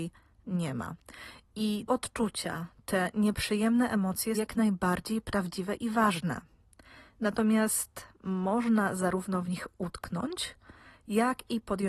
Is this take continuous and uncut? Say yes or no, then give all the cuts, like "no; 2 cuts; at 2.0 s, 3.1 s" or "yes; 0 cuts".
no; 2 cuts; at 1.9 s, 4.3 s